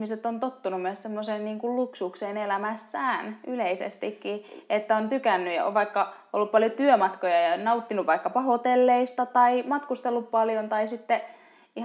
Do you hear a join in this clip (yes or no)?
no